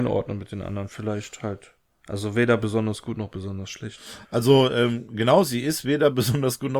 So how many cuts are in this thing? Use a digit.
0